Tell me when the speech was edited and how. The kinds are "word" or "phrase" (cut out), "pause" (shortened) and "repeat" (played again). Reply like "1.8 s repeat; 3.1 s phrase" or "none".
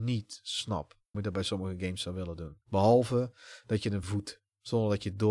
1.1 s word; 2.6 s pause; 4.0 s word